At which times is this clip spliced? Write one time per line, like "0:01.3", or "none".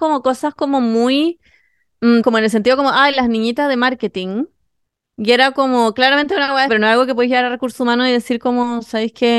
0:02.2
0:06.7

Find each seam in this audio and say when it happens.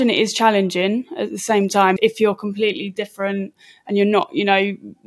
0:02.0

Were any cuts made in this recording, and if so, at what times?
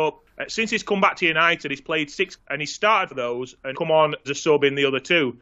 0:02.4
0:03.1
0:03.7
0:04.2

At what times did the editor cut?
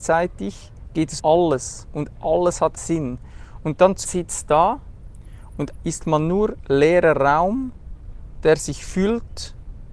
0:01.2
0:02.8
0:04.0
0:05.8

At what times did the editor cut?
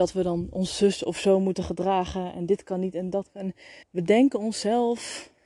0:03.8

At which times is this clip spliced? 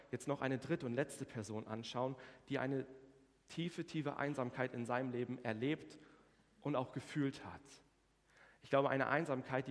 none

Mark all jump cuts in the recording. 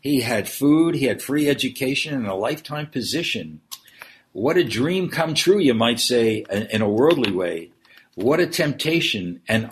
none

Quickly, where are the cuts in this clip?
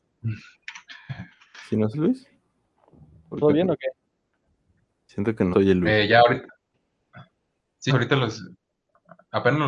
0:01.9
0:03.4
0:05.5
0:07.9

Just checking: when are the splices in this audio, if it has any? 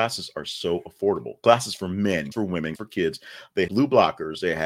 0:02.3
0:02.8
0:03.7

